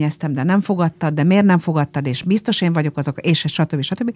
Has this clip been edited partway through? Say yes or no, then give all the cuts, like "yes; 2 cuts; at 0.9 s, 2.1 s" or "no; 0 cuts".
no; 0 cuts